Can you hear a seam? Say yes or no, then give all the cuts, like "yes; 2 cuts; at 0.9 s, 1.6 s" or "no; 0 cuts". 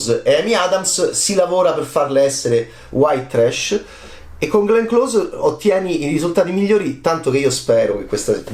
no; 0 cuts